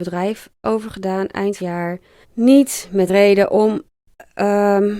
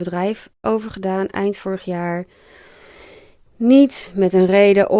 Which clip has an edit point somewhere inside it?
first; 3 cuts; at 1.6 s, 2.2 s, 3.1 s

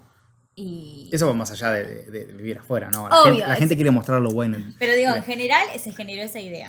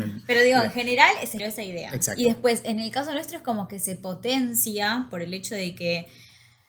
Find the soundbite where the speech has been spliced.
second; 1 cut; at 1.4 s

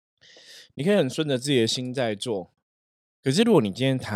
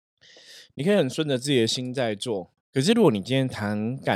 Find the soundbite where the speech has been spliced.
second; 1 cut; at 2.6 s

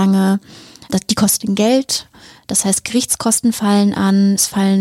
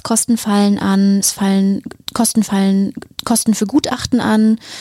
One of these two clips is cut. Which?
second; 1 cut; at 2.4 s

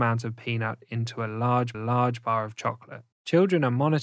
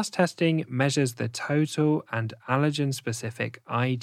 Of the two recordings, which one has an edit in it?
first; 2 cuts; at 1.7 s, 3.1 s

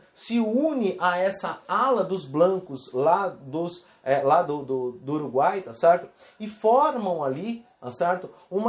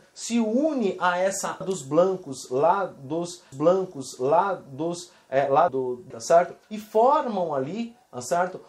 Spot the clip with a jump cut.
second; 5 cuts; at 1.6 s, 3.5 s, 5.7 s, 6.1 s, 6.6 s

